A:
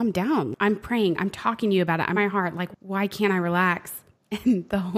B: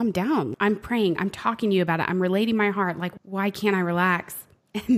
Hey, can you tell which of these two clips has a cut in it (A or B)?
A